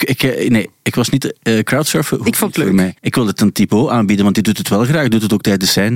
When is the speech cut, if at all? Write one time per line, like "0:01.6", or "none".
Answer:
0:03.0